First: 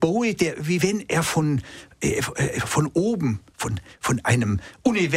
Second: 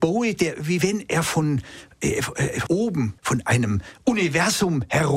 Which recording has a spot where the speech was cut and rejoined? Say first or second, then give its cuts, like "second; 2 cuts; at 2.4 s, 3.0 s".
second; 2 cuts; at 2.7 s, 3.2 s